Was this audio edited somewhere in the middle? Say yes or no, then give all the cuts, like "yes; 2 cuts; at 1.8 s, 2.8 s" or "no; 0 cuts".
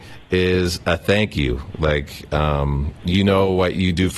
no; 0 cuts